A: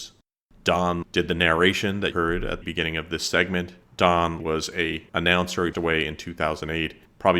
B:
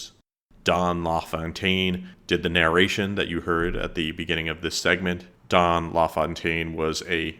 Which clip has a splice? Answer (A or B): A